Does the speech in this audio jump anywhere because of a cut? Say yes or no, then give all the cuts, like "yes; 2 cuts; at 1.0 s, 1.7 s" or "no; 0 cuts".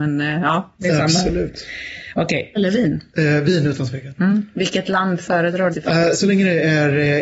yes; 3 cuts; at 2.6 s, 3.1 s, 5.7 s